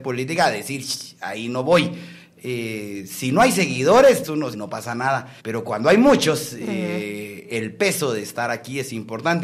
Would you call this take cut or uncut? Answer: cut